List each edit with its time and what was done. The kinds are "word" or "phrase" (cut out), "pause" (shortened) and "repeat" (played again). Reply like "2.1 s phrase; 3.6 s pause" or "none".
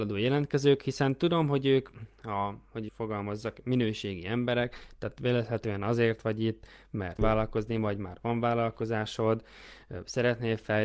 2.9 s word; 7.2 s word